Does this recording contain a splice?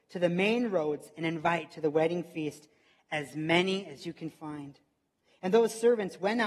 no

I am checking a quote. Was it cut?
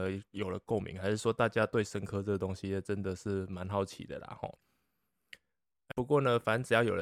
yes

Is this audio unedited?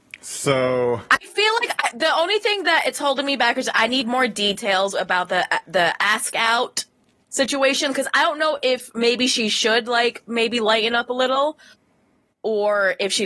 yes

